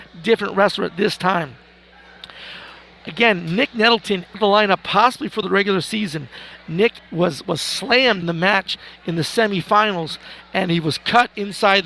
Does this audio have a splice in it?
yes; 4 cuts; at 4.3 s, 5.4 s, 7.0 s, 8.2 s

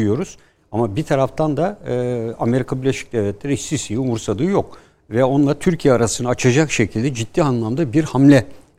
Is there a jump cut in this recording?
no; 0 cuts

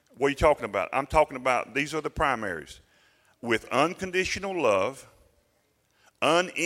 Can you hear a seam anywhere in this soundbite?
no; 0 cuts

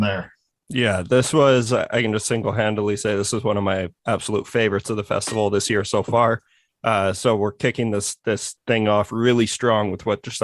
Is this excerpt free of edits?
yes; 0 cuts

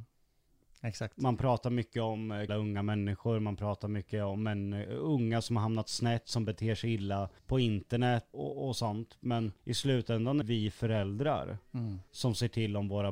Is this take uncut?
no; 6 cuts; at 2.5 s, 7.4 s, 8.3 s, 9.6 s, 10.4 s, 12.1 s

